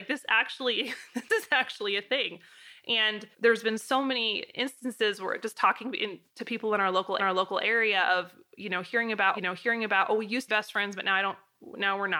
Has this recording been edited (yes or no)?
yes